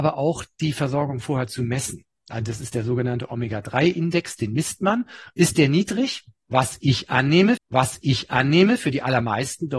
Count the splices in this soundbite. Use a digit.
1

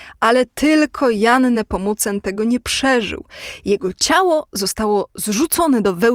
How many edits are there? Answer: 0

